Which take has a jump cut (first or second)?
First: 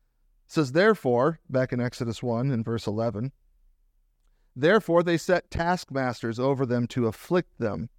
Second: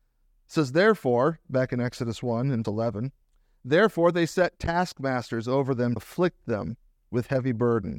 second